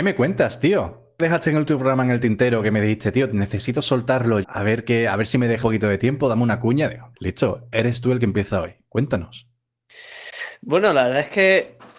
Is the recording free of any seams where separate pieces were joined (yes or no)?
no